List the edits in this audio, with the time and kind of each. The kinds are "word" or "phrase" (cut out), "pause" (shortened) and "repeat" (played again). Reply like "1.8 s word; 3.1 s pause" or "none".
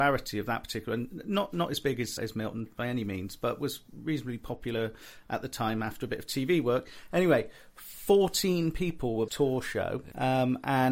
2.2 s word; 2.7 s word; 9.3 s phrase